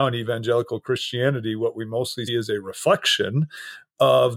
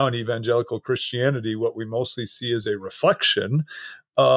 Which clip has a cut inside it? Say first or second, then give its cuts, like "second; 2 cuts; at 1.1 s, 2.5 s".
first; 1 cut; at 2.3 s